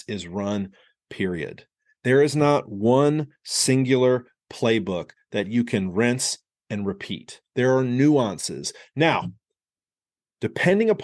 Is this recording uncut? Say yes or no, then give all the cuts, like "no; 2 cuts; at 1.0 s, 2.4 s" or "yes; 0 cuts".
yes; 0 cuts